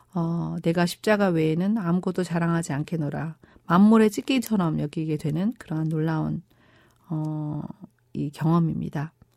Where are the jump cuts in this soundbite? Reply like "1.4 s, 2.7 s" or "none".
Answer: none